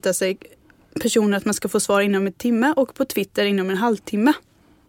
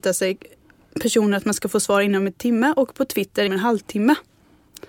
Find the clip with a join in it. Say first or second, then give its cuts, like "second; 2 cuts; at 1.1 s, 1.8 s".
second; 1 cut; at 3.5 s